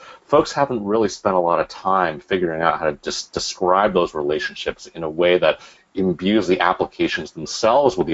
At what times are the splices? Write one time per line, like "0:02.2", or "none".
none